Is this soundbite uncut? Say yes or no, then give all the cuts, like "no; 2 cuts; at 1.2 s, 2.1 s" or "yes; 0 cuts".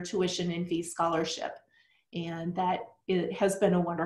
yes; 0 cuts